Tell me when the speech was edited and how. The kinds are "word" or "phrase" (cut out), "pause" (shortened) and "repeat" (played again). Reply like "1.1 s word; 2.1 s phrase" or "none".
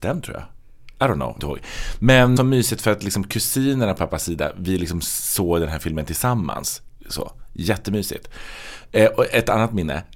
1.4 s phrase; 2.4 s phrase; 4.0 s word